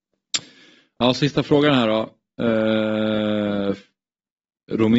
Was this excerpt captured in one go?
yes; 0 cuts

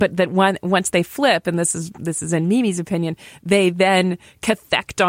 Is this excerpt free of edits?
yes; 0 cuts

